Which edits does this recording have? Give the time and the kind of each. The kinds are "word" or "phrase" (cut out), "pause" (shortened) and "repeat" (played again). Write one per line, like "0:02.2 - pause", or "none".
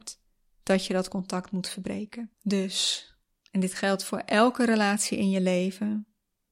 0:02.3 - pause